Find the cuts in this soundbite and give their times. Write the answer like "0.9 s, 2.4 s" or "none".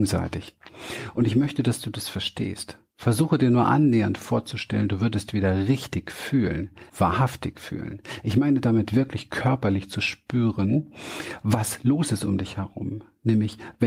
6.9 s